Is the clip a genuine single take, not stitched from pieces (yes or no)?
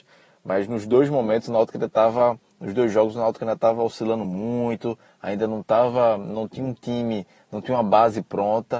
yes